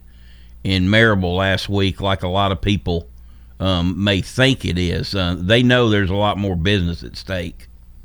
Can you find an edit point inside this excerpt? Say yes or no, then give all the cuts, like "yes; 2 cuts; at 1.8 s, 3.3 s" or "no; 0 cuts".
no; 0 cuts